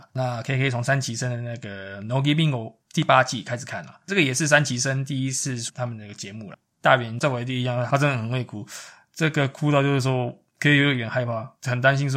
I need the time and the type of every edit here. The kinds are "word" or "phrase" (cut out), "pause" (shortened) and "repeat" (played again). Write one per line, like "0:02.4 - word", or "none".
0:02.8 - pause
0:04.0 - pause